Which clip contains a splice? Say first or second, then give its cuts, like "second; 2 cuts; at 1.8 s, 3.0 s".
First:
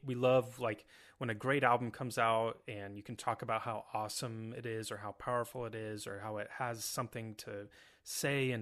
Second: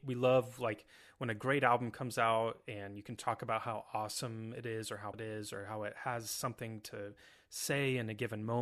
second; 1 cut; at 5.1 s